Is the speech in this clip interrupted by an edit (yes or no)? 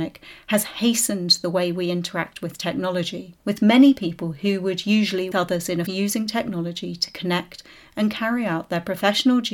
yes